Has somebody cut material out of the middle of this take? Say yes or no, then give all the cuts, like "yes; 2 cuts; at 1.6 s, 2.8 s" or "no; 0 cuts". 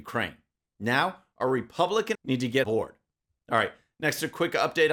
yes; 2 cuts; at 2.1 s, 2.6 s